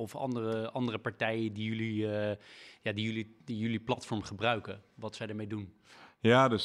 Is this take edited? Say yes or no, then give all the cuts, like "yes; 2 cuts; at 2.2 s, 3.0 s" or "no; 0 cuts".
no; 0 cuts